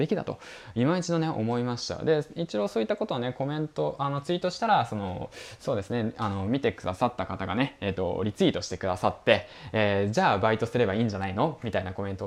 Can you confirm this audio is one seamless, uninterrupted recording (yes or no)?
yes